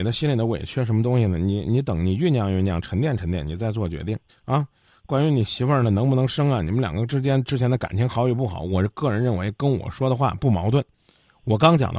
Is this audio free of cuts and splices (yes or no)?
no